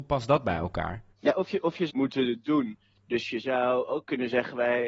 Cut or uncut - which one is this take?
cut